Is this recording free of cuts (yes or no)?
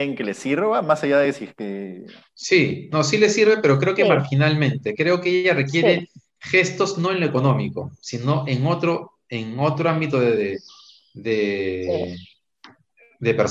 yes